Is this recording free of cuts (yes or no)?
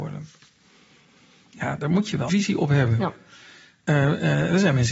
no